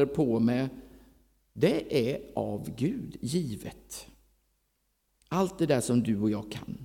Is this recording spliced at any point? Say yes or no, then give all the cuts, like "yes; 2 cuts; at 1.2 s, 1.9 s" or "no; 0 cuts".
no; 0 cuts